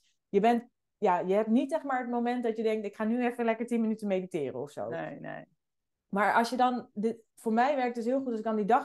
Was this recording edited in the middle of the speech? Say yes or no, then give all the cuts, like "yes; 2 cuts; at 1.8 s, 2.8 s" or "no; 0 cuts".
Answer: no; 0 cuts